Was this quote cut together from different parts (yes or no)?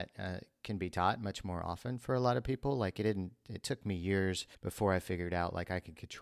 yes